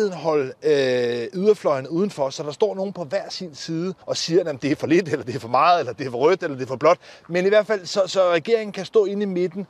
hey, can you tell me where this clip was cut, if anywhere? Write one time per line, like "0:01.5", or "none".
0:04.0